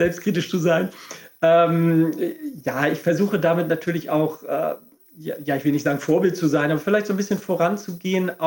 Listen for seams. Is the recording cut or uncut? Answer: uncut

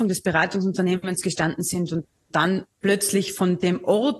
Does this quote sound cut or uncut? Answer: cut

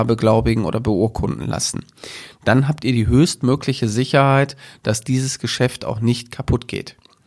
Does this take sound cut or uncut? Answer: uncut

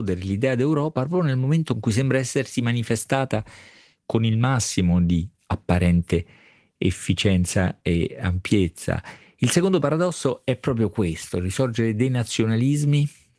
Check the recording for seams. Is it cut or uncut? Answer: uncut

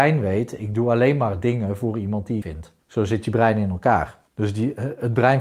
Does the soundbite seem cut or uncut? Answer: cut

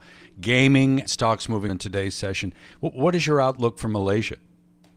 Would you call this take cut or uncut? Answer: cut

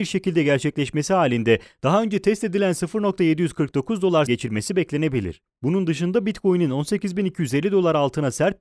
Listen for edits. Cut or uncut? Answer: cut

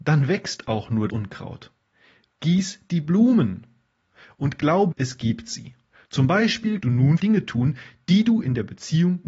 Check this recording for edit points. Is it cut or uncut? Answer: cut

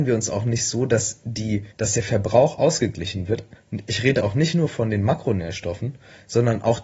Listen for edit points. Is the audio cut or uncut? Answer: cut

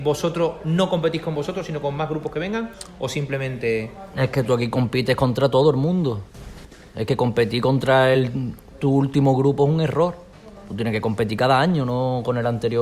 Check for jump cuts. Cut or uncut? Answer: uncut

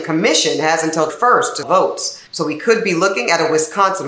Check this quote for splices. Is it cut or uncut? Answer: cut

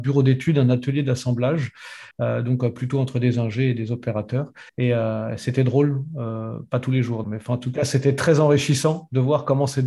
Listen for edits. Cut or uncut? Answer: cut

